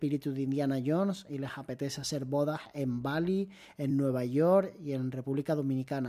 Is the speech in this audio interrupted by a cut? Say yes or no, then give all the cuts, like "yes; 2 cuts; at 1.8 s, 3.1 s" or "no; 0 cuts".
no; 0 cuts